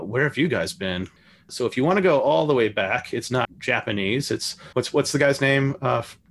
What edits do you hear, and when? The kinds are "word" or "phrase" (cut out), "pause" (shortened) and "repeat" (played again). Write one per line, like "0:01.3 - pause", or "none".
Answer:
0:03.4 - word
0:04.7 - pause

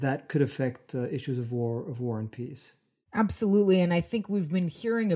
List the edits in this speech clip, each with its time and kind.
none

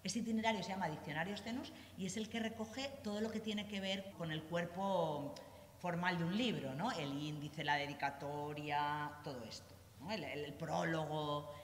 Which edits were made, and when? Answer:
0:04.1 - word

